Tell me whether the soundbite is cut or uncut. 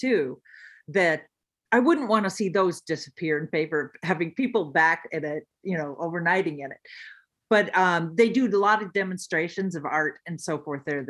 uncut